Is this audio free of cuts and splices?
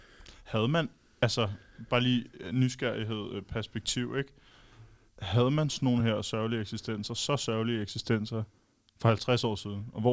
yes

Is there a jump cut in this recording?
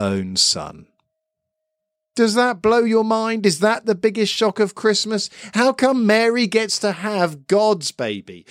no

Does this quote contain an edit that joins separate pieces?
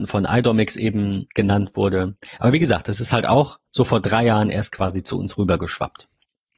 yes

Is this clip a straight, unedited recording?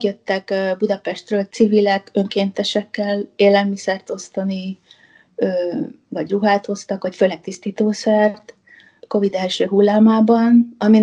no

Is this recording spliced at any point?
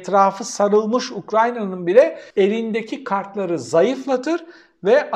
yes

